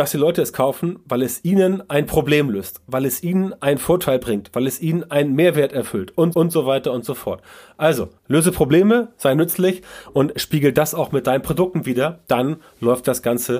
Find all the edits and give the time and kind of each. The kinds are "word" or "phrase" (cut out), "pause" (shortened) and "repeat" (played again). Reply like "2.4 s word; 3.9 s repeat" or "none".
6.3 s repeat; 8.2 s pause

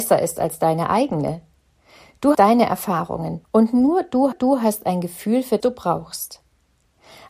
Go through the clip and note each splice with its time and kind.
2.3 s word; 3.4 s pause; 4.3 s repeat; 5.6 s phrase

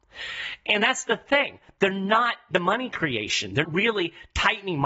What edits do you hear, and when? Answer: 2.5 s word; 3.6 s word

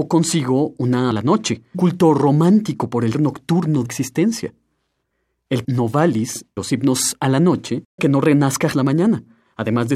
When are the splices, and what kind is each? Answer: 1.1 s word; 1.7 s word; 3.1 s word; 3.9 s word; 5.6 s word; 6.6 s word; 8.0 s word; 8.7 s word

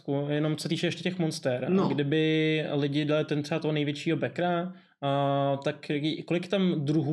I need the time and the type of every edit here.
none

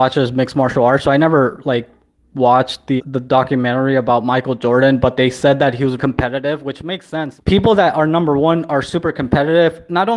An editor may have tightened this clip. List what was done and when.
3.0 s word; 6.0 s word; 7.4 s word

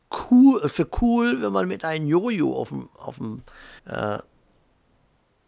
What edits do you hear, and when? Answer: 3.8 s pause

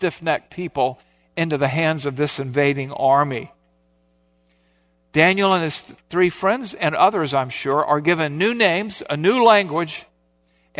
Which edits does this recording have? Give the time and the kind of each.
none

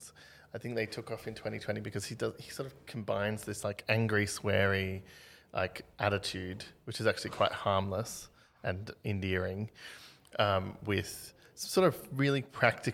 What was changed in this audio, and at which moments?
none

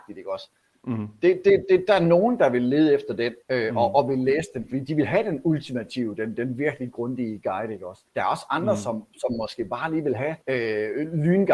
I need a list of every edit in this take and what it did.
3.4 s pause; 8.1 s pause; 10.4 s pause

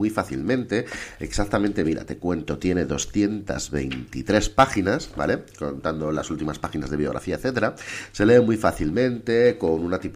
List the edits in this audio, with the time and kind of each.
none

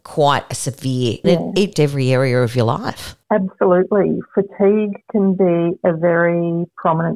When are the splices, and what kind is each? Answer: 1.2 s phrase; 1.7 s phrase; 3.2 s pause

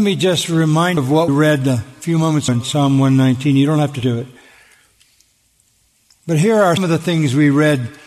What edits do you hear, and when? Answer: 1.0 s word; 1.3 s word; 2.5 s word; 4.0 s word; 6.8 s word

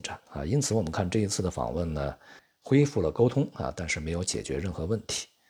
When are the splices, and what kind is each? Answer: 2.4 s pause

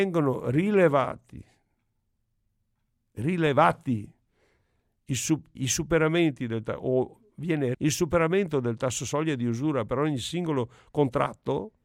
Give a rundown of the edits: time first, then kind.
5.6 s word; 7.7 s word

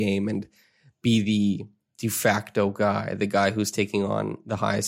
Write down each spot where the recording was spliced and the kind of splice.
none

